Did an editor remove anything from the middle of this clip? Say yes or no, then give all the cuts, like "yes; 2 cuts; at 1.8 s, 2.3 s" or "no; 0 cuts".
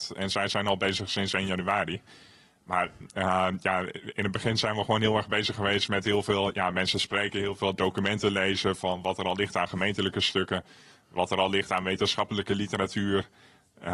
no; 0 cuts